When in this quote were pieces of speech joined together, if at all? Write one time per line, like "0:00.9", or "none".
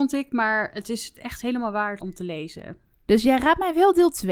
0:02.0